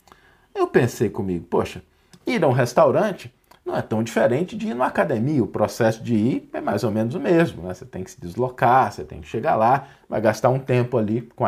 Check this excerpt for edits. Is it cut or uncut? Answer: uncut